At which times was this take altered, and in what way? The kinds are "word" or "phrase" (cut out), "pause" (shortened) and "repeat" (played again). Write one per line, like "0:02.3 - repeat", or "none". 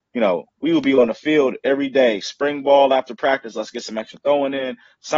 none